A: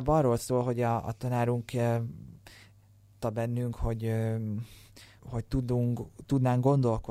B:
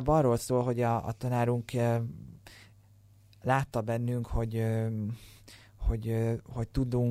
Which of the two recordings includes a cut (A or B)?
A